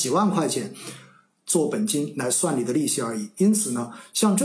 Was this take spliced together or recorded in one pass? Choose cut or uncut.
uncut